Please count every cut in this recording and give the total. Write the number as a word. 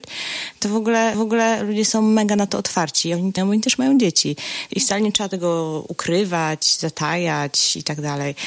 two